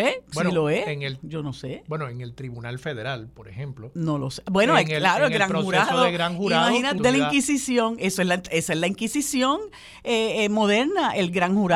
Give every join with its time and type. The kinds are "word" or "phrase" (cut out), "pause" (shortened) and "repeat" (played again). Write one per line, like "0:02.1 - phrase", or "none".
0:07.0 - phrase